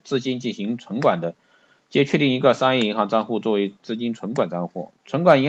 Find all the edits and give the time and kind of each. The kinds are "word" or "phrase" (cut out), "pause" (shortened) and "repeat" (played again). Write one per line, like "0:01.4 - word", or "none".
none